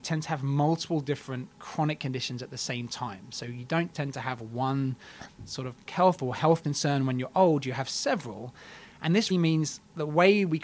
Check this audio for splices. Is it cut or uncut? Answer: cut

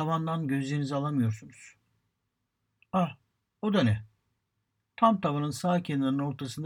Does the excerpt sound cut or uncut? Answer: uncut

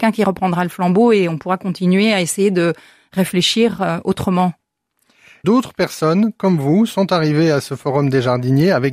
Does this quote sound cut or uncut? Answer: cut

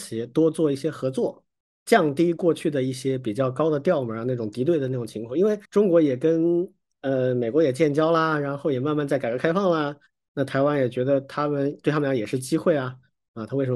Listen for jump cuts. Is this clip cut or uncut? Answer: cut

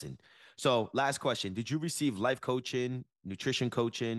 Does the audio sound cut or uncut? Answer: uncut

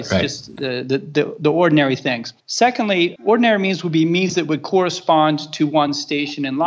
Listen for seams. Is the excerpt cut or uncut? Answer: cut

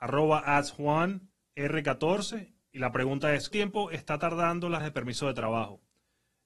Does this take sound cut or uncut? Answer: cut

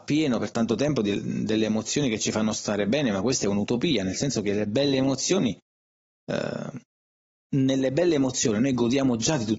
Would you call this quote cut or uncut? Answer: uncut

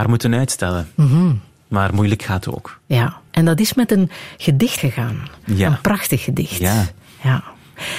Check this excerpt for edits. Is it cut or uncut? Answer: cut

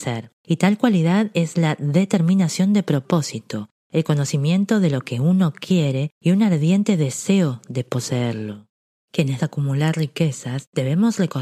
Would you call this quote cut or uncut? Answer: cut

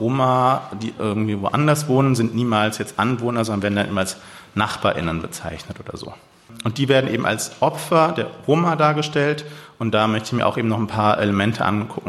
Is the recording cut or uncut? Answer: uncut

